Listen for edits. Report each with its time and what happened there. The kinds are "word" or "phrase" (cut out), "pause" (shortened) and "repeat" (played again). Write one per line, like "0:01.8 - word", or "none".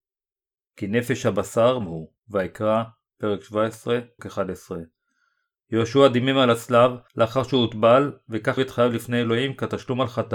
0:01.8 - word
0:02.2 - pause
0:04.2 - word
0:07.1 - pause
0:08.6 - word